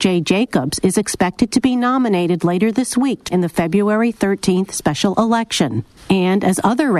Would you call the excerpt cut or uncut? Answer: cut